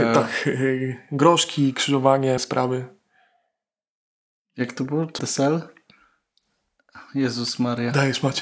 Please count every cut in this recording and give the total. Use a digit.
2